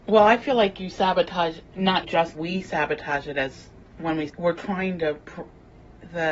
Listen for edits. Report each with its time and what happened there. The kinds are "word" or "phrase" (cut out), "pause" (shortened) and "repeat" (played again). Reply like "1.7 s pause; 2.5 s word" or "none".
2.0 s word; 2.3 s phrase; 4.3 s phrase